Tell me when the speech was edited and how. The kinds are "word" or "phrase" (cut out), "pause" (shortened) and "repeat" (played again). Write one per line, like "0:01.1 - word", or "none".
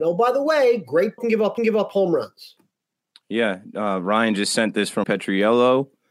0:01.2 - phrase
0:01.6 - repeat
0:05.0 - word